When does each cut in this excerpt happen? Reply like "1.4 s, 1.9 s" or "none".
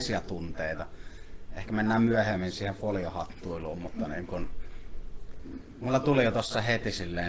none